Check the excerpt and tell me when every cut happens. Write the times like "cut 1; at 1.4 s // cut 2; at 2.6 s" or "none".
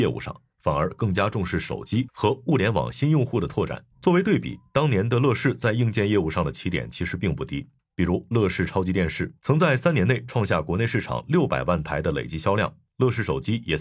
cut 1; at 3.9 s // cut 2; at 9.4 s